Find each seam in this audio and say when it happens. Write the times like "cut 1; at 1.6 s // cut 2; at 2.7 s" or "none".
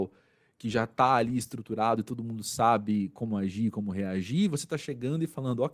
none